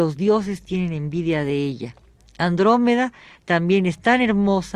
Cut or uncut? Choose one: uncut